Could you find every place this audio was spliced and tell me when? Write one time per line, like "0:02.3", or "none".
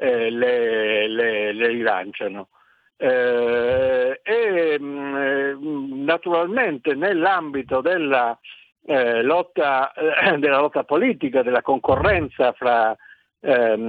none